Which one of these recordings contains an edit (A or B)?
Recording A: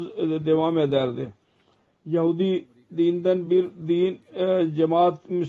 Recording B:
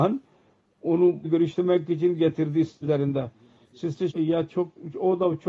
B